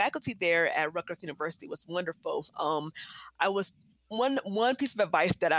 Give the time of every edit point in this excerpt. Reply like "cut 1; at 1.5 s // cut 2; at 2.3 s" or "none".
none